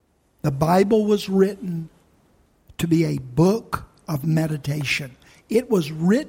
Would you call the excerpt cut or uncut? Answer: uncut